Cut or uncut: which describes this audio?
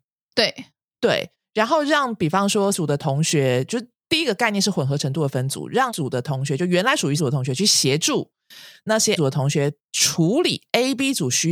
cut